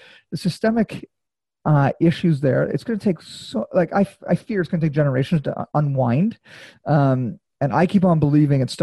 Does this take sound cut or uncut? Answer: uncut